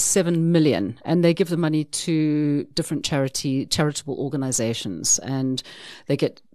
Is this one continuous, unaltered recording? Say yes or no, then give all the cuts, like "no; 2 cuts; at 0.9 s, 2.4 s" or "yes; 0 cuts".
yes; 0 cuts